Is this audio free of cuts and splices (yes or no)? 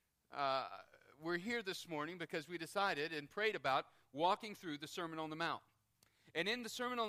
yes